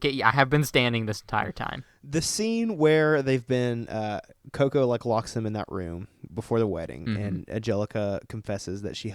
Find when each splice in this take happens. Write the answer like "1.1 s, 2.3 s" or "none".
none